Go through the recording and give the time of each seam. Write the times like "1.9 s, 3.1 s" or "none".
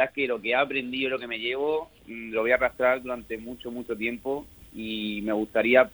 none